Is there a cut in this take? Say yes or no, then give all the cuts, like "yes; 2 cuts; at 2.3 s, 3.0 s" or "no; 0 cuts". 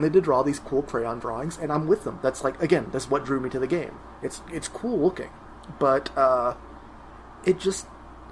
no; 0 cuts